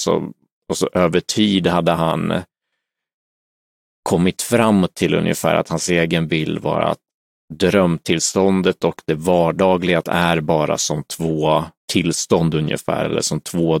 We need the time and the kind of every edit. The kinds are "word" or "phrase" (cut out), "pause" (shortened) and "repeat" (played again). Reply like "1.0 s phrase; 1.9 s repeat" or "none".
10.0 s word; 11.8 s pause